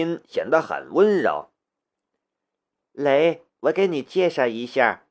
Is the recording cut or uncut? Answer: cut